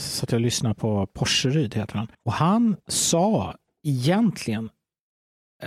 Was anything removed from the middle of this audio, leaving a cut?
yes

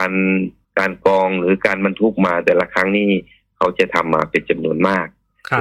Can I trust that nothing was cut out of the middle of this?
yes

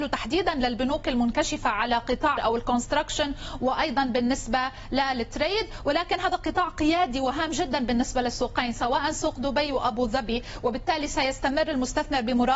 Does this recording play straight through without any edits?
no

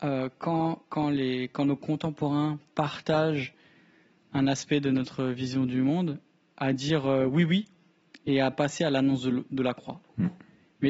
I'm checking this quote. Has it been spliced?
no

